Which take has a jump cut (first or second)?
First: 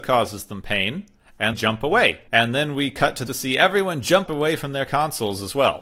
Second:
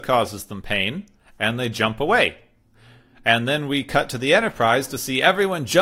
first